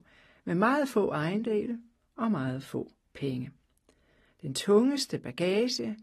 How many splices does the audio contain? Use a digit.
0